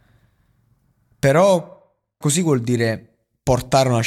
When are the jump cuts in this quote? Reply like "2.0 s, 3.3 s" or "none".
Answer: 2.2 s